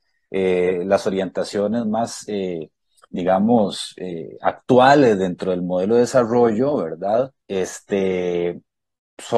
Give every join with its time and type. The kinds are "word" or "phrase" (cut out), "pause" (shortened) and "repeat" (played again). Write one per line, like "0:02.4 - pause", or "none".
0:07.4 - pause